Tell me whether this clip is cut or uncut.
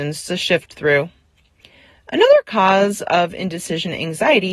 uncut